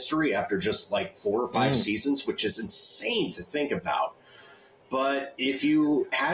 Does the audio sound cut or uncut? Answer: uncut